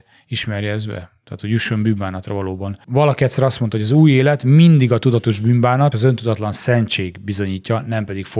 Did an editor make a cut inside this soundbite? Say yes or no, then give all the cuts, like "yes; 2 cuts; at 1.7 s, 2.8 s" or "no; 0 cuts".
yes; 1 cut; at 5.9 s